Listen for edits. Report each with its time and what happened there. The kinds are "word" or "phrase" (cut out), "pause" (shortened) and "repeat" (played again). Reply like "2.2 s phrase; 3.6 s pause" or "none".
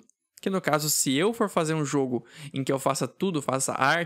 none